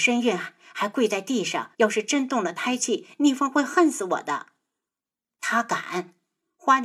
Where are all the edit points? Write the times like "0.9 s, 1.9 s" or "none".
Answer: 1.7 s